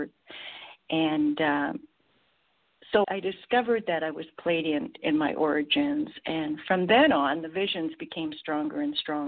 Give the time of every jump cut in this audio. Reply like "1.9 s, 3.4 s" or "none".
3.0 s, 5.0 s